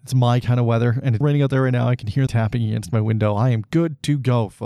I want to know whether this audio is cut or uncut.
cut